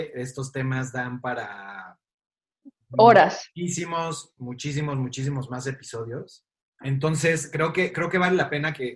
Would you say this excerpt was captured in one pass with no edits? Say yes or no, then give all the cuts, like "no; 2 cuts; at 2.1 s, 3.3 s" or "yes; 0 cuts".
yes; 0 cuts